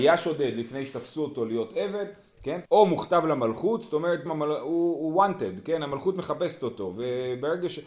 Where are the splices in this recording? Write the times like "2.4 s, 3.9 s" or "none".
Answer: 2.6 s, 4.3 s